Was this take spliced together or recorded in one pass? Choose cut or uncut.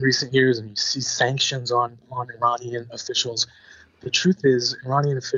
uncut